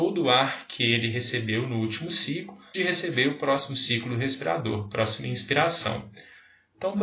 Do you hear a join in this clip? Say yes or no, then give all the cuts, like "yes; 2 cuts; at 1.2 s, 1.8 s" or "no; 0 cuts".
yes; 1 cut; at 2.7 s